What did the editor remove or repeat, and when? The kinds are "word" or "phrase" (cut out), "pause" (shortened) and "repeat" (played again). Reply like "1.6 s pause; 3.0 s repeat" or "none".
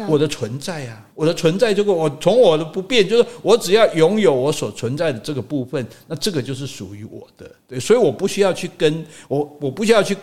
1.1 s word